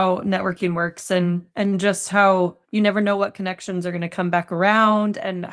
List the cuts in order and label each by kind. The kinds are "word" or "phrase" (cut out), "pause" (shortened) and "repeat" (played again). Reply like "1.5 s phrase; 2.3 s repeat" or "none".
1.5 s pause; 2.6 s pause

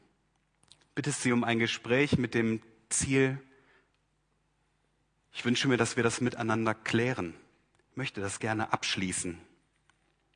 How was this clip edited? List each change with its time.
none

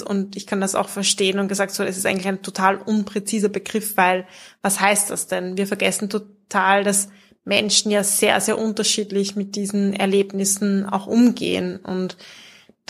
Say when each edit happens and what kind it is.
none

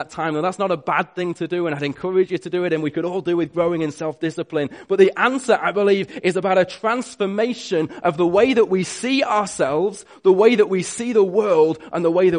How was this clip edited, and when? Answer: none

